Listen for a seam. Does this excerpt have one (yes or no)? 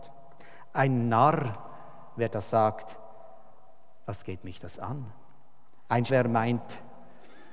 yes